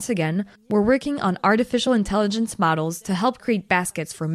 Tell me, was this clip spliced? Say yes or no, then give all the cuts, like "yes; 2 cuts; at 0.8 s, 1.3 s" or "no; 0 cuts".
no; 0 cuts